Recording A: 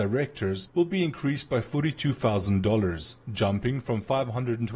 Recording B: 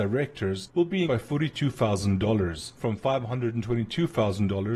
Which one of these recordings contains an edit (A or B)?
B